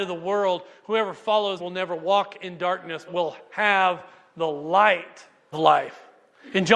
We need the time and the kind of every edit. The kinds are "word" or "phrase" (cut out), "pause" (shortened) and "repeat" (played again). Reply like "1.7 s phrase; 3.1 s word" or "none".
1.6 s word; 3.1 s word; 5.5 s word